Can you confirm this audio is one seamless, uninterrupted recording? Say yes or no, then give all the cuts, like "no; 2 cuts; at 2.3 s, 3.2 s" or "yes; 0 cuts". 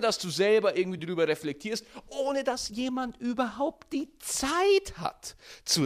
yes; 0 cuts